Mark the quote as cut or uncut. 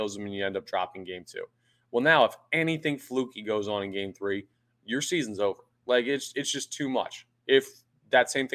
uncut